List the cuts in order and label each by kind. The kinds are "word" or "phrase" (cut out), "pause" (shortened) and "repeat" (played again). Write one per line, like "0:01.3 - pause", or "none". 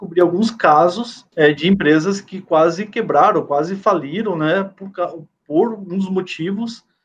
0:01.3 - pause